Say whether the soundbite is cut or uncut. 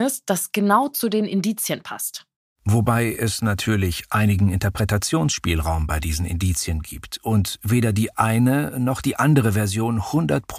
uncut